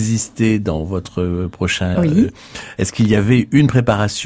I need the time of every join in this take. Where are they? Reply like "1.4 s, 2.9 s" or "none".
1.9 s